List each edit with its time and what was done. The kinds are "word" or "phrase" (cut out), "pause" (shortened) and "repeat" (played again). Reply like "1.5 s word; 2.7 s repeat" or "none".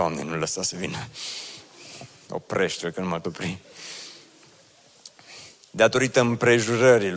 3.2 s word